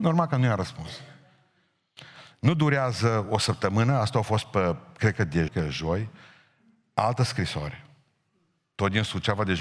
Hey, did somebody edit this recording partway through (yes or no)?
yes